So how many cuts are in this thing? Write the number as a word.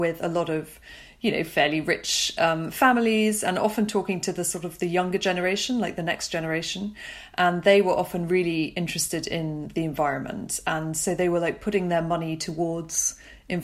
zero